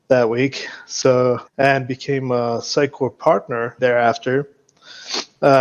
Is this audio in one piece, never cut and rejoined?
no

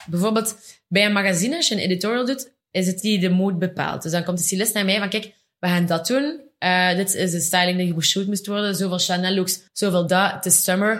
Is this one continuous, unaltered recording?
no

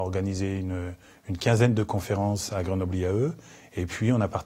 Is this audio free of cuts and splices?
yes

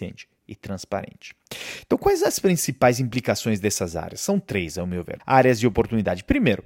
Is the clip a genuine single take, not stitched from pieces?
no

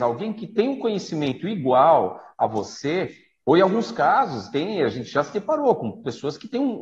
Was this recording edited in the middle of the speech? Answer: no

